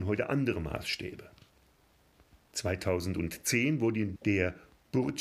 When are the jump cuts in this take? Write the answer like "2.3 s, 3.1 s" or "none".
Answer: 4.2 s